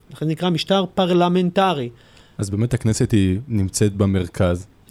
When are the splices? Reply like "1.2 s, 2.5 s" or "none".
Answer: none